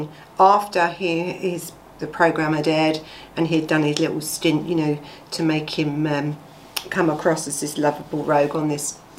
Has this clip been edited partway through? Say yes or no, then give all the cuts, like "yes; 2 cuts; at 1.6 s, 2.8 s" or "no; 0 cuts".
no; 0 cuts